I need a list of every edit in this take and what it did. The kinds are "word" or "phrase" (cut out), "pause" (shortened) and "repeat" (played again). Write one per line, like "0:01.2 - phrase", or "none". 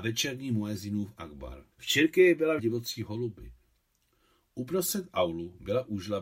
0:01.7 - pause
0:02.6 - phrase